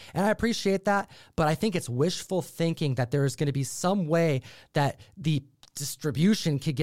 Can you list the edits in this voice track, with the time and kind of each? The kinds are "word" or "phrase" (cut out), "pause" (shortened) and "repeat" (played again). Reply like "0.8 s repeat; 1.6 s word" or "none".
none